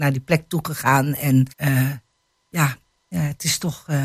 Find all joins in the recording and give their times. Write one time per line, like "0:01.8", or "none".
0:01.5